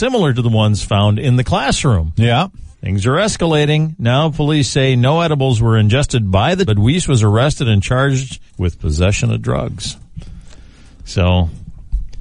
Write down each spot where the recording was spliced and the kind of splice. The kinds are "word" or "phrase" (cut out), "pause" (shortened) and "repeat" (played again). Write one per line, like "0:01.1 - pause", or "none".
0:02.7 - pause
0:06.7 - word
0:08.5 - pause